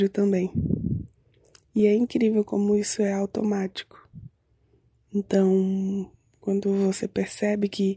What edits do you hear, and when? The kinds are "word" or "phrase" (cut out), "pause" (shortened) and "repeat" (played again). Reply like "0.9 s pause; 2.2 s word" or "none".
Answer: none